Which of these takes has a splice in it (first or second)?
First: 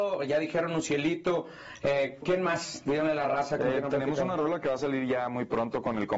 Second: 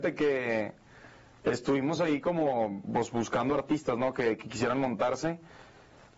first